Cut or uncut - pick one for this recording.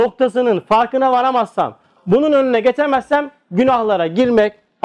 uncut